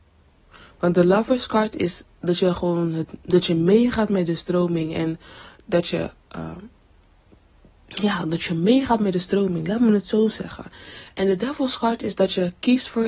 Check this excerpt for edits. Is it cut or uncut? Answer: uncut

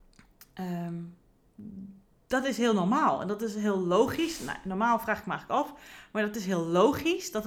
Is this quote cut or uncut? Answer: uncut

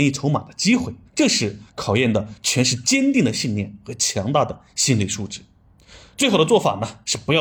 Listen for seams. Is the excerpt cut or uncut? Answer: cut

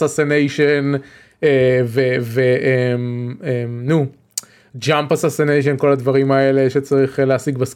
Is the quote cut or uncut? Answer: uncut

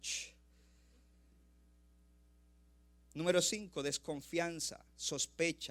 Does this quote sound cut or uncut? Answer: uncut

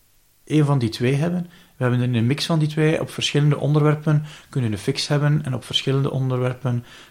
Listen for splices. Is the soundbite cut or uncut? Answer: uncut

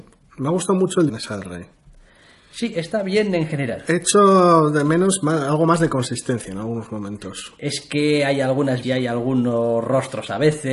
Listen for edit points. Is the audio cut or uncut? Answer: cut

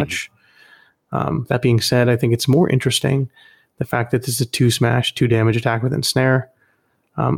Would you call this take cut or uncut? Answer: uncut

